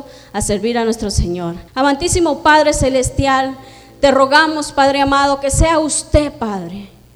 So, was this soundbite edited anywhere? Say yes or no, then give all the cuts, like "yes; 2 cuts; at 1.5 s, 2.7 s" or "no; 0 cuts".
yes; 1 cut; at 1.7 s